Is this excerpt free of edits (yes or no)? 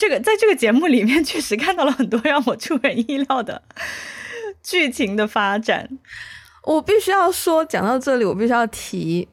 yes